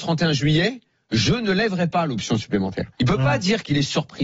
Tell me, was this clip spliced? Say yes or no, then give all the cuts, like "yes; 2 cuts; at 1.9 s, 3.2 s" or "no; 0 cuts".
yes; 1 cut; at 2.9 s